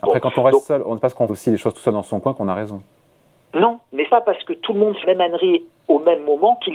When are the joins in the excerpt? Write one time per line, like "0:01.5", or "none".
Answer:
0:01.3
0:04.1
0:05.0